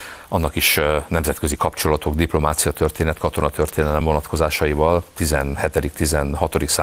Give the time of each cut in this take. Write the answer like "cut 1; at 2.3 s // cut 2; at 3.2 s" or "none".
none

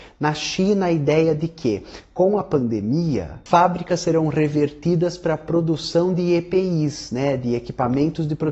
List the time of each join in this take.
none

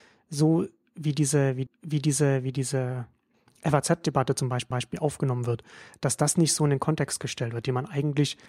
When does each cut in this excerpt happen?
cut 1; at 1.7 s // cut 2; at 4.7 s

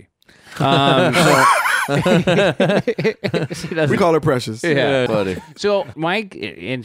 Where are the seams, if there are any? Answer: cut 1; at 4.0 s // cut 2; at 5.1 s // cut 3; at 5.9 s

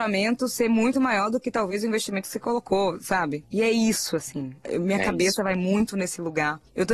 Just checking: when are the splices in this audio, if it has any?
none

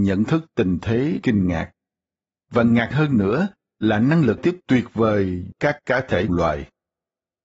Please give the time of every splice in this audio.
cut 1; at 1.2 s // cut 2; at 2.9 s // cut 3; at 4.4 s // cut 4; at 5.5 s // cut 5; at 6.3 s

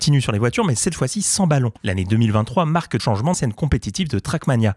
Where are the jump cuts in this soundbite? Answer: cut 1; at 1.8 s // cut 2; at 3.0 s // cut 3; at 3.3 s

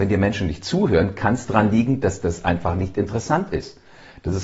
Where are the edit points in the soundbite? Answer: none

